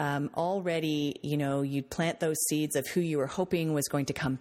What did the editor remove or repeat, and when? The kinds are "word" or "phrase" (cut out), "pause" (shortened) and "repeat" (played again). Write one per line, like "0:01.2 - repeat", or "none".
none